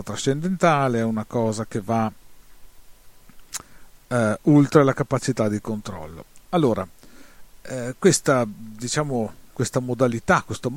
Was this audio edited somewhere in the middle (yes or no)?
no